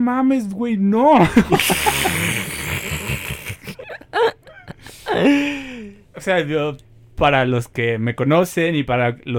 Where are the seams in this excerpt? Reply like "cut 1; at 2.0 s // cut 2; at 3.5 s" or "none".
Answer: none